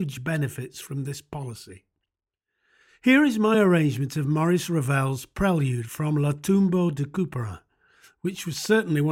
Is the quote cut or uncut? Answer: uncut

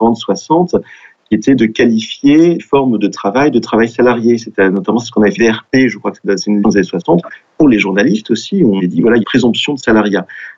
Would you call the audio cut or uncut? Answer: cut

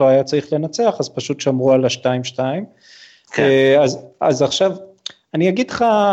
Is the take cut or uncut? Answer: uncut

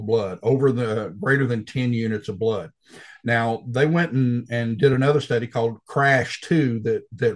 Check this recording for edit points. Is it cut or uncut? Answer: uncut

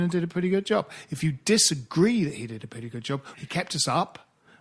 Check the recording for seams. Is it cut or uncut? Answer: cut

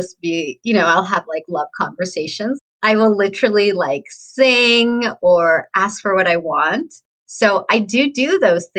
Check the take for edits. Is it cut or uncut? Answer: uncut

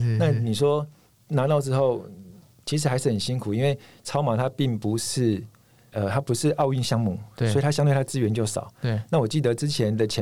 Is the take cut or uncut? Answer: uncut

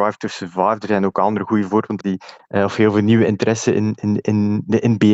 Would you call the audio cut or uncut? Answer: cut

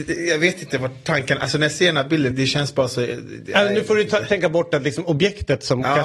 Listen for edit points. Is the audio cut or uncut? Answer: cut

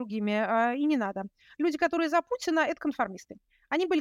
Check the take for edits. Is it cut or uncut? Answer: uncut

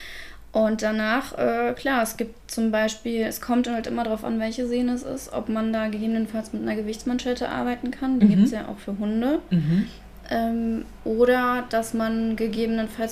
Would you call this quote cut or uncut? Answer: uncut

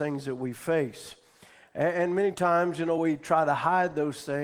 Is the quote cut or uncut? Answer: uncut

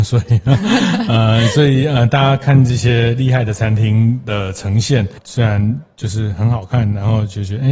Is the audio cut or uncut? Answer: uncut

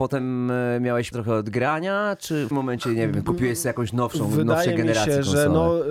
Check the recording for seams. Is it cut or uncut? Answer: cut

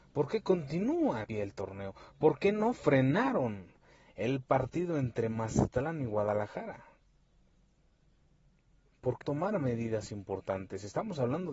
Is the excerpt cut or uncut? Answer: cut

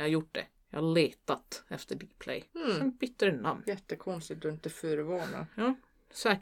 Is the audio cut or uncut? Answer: cut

